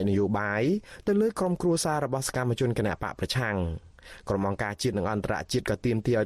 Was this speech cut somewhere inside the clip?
no; 0 cuts

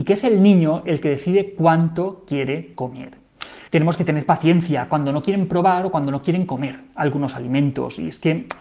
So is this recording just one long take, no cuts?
no; 1 cut; at 3.7 s

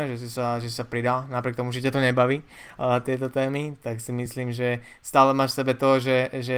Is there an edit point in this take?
no; 0 cuts

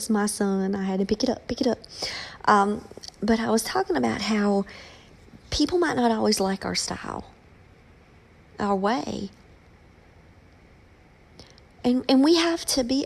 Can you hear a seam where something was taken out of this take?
no; 0 cuts

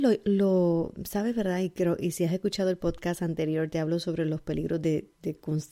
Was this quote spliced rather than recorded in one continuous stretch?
no; 0 cuts

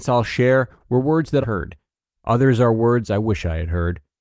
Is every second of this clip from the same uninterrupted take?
no; 1 cut; at 1.4 s

